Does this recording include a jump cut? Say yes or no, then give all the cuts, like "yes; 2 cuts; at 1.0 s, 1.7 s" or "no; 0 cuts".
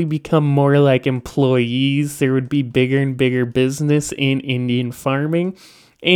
no; 0 cuts